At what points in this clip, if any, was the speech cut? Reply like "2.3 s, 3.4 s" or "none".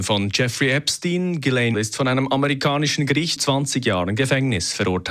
1.7 s, 3.4 s